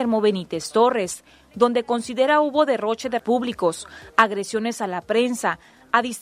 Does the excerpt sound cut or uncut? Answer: cut